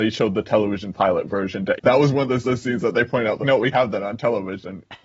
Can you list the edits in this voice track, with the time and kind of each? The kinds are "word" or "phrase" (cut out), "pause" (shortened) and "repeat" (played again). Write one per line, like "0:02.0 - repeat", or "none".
0:01.8 - word
0:02.4 - repeat
0:03.4 - word
0:03.7 - word

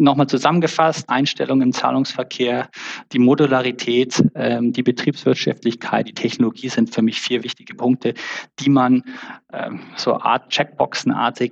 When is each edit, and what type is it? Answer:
0:01.1 - word
0:06.1 - word
0:09.9 - pause

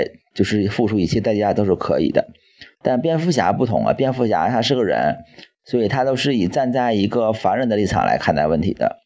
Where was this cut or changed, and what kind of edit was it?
0:02.7 - pause

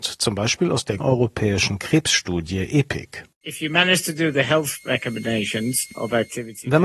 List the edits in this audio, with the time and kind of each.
0:01.0 - word

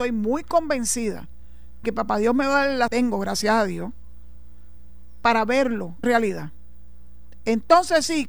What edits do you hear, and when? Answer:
0:01.8 - word
0:02.9 - phrase
0:06.0 - word

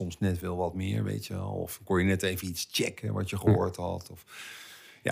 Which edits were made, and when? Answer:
none

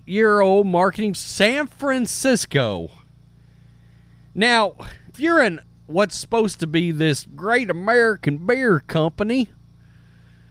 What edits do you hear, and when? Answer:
0:01.1 - phrase
0:05.1 - word

